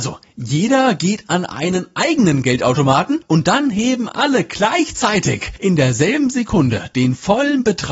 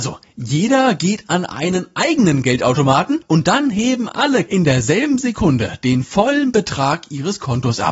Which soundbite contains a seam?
second; 1 cut; at 4.5 s

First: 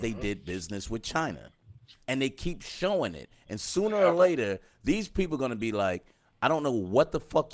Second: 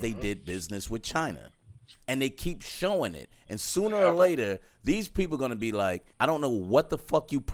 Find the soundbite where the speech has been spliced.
second; 1 cut; at 6.1 s

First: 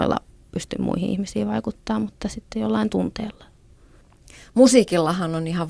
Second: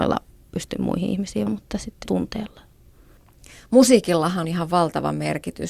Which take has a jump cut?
second; 3 cuts; at 1.5 s, 2.1 s, 4.4 s

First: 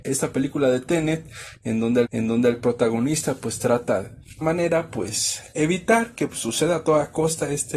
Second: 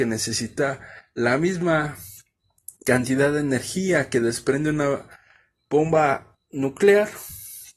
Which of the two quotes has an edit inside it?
first; 2 cuts; at 2.0 s, 4.4 s

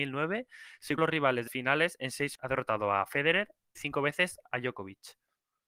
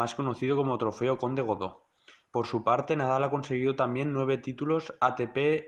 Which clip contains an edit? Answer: first; 4 cuts; at 1.0 s, 1.5 s, 2.3 s, 3.8 s

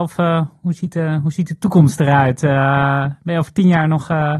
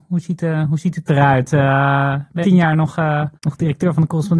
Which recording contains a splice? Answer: second; 3 cuts; at 1.1 s, 2.4 s, 3.4 s

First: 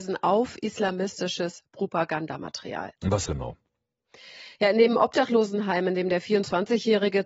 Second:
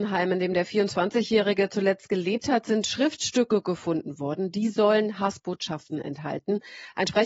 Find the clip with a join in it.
first; 1 cut; at 3.2 s

